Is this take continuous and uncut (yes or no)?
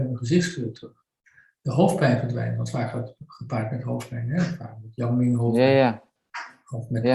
yes